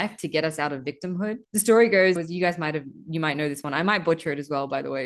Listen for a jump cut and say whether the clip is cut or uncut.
cut